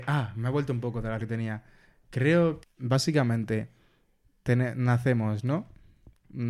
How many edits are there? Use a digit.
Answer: 2